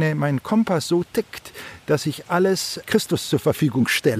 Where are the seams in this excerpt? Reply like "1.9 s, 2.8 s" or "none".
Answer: 2.8 s